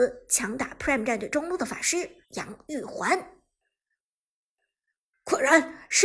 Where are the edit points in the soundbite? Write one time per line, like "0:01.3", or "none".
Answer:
0:02.2